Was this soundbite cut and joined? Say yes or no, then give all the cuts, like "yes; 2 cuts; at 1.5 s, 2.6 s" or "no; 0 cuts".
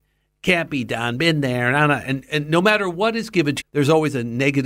yes; 1 cut; at 3.6 s